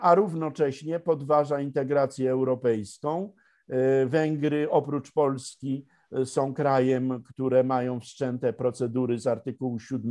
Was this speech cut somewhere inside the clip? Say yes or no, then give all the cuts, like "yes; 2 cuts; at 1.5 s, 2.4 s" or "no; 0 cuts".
no; 0 cuts